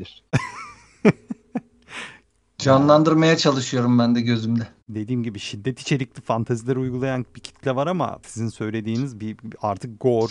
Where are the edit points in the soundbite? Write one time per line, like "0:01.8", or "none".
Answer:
0:08.2